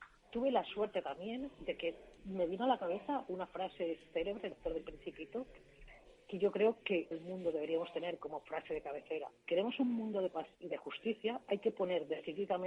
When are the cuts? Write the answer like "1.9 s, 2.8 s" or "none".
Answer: 2.2 s, 4.5 s, 7.1 s, 9.5 s, 10.5 s